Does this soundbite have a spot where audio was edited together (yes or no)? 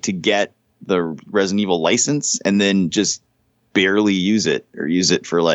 no